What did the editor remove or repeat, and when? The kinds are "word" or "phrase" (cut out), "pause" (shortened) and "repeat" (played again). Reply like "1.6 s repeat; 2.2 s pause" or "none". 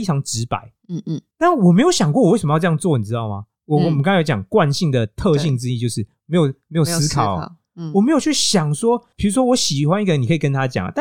1.3 s pause; 3.6 s pause